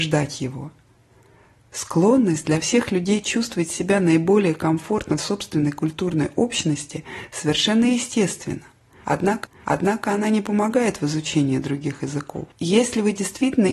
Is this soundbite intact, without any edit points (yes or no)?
no